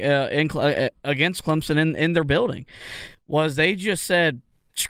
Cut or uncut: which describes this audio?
uncut